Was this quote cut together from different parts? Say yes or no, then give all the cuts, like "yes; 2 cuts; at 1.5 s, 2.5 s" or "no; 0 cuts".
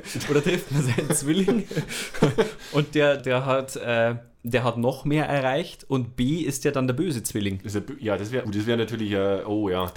yes; 3 cuts; at 3.2 s, 4.3 s, 8.4 s